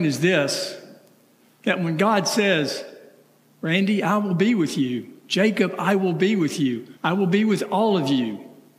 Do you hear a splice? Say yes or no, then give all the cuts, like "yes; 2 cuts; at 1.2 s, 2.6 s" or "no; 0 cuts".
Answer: yes; 1 cut; at 7.0 s